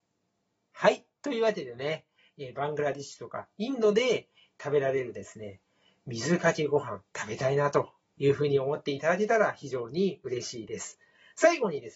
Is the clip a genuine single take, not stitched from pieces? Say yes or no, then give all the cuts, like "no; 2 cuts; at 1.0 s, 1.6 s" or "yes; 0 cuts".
yes; 0 cuts